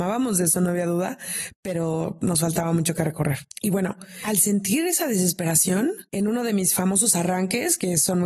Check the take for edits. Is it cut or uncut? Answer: cut